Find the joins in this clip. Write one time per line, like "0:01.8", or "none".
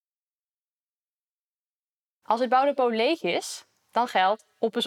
none